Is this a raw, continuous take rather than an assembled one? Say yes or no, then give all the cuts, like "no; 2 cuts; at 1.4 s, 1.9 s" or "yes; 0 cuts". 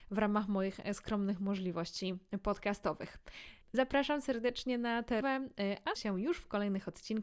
no; 3 cuts; at 3.6 s, 5.2 s, 6.0 s